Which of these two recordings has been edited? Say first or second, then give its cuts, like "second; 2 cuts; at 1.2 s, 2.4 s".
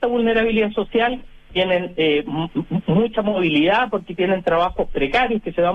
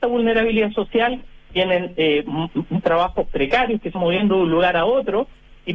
second; 2 cuts; at 2.8 s, 3.9 s